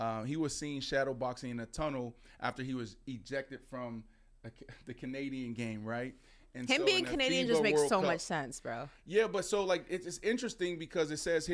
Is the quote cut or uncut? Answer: uncut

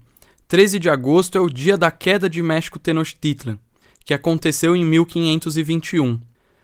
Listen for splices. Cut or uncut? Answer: uncut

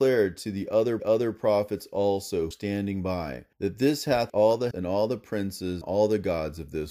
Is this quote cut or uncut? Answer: cut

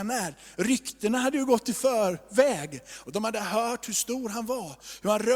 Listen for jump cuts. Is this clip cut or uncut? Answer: uncut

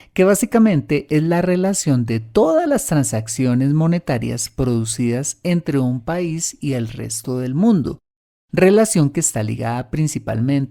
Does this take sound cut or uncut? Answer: uncut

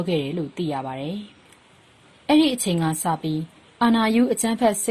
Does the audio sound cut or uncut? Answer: uncut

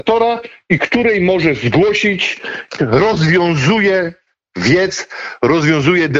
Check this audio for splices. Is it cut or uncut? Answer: cut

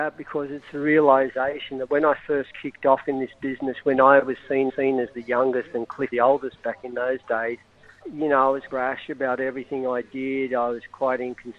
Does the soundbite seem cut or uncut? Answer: cut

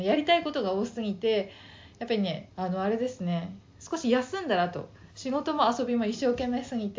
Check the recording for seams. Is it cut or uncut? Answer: cut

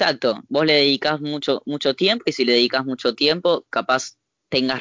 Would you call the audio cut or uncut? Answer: uncut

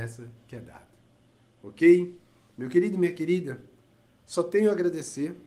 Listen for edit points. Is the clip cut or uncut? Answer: uncut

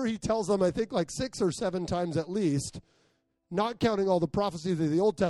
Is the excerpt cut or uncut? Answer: uncut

